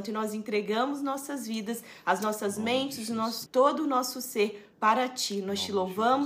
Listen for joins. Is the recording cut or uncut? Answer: cut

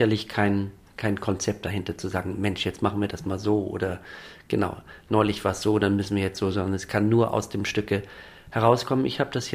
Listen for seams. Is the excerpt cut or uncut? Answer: uncut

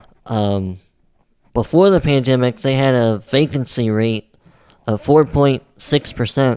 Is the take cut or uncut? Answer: uncut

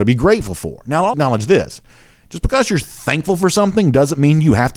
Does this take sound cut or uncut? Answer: cut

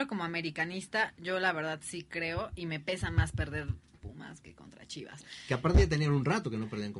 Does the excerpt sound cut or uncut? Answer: cut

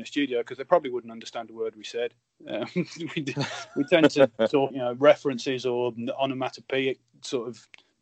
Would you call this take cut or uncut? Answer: cut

